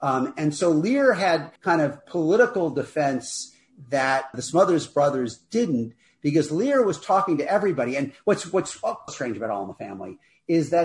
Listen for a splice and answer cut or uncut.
cut